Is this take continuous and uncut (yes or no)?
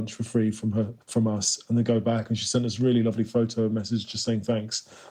no